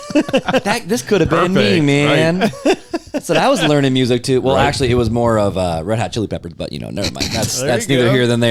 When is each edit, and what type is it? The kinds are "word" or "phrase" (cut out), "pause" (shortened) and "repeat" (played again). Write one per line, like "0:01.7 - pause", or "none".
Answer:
none